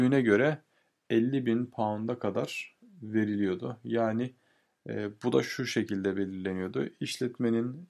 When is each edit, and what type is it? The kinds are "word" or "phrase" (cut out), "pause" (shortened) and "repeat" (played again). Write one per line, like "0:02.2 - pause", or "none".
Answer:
none